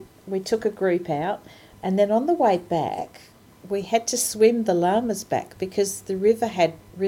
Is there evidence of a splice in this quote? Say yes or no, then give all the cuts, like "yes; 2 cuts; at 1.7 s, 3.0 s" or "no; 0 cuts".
no; 0 cuts